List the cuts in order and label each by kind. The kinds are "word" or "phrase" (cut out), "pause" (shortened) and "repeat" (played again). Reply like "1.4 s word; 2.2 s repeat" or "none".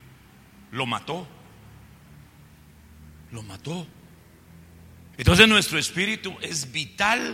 5.1 s pause